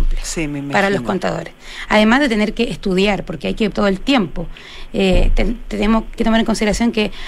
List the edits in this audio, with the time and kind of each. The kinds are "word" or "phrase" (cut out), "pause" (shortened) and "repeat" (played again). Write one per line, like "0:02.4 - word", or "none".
0:03.7 - word
0:06.2 - word

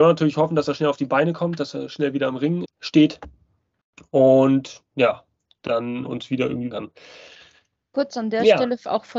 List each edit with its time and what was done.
0:02.6 - word
0:06.0 - word
0:06.7 - word

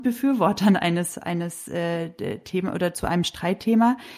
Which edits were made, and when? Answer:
none

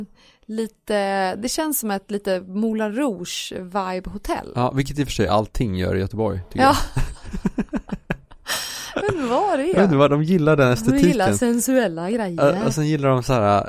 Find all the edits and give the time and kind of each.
none

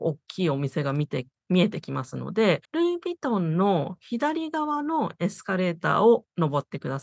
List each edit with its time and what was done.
0:02.6 - pause

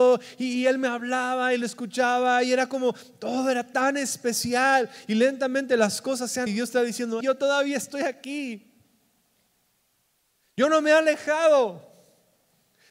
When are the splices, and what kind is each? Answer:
0:06.5 - word
0:07.2 - word

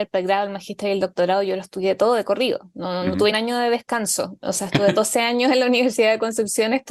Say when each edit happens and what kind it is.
0:03.3 - word

